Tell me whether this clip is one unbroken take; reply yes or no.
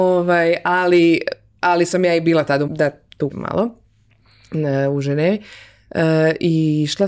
no